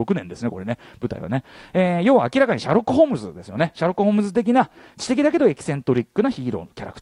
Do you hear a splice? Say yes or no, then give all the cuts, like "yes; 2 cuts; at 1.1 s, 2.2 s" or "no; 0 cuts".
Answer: no; 0 cuts